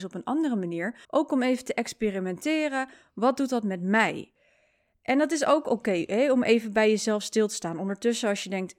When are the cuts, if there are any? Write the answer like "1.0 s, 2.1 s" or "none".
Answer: 1.0 s